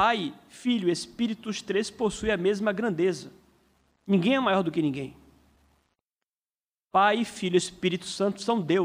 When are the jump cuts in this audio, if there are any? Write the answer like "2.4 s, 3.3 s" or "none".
none